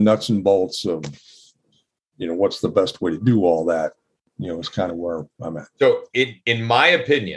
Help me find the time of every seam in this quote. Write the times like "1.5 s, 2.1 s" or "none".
none